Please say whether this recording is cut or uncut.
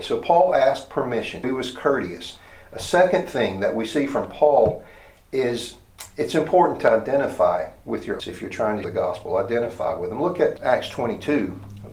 cut